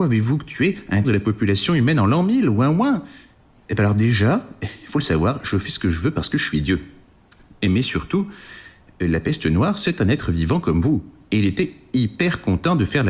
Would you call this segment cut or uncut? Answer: cut